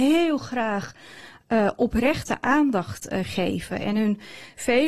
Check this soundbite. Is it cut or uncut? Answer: uncut